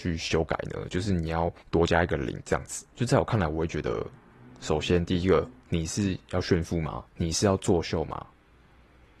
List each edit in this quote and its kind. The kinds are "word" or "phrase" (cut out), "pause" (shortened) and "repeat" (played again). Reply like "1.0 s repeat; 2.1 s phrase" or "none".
1.6 s pause; 2.9 s pause; 5.6 s pause; 7.1 s pause